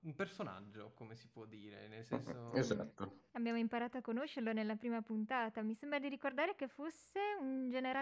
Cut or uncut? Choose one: cut